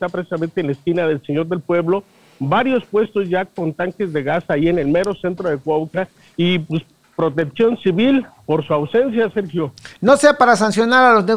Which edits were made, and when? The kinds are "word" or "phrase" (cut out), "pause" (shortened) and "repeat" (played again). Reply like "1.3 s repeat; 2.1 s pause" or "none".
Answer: none